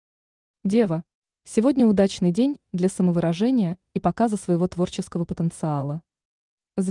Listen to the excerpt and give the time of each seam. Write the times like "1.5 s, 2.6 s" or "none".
none